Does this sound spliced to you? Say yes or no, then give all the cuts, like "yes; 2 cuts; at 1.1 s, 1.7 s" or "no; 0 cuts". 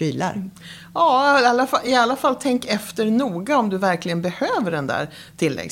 no; 0 cuts